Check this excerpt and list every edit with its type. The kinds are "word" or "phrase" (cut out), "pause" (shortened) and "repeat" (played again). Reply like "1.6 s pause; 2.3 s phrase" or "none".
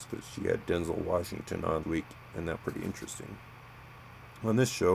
1.8 s word; 2.6 s word